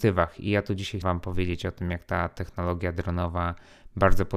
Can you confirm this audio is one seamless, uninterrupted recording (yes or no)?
no